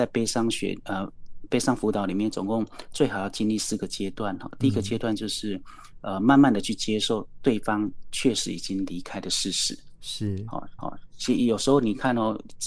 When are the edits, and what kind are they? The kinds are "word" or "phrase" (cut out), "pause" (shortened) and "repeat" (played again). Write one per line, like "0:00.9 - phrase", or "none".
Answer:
0:10.8 - repeat